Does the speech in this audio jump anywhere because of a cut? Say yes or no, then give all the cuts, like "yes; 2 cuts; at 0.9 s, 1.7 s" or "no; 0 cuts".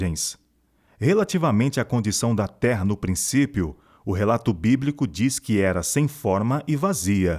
no; 0 cuts